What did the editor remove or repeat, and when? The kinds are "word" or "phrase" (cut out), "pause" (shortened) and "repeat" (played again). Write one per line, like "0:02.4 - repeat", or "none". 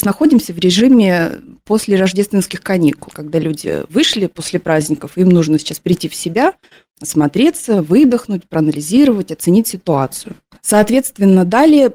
none